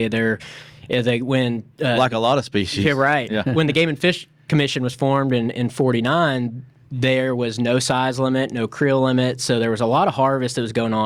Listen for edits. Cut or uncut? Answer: uncut